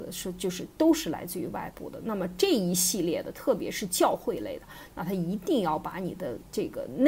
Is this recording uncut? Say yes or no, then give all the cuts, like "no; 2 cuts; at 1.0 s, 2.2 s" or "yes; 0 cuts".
yes; 0 cuts